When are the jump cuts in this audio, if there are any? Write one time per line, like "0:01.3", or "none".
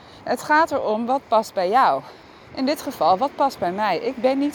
0:02.2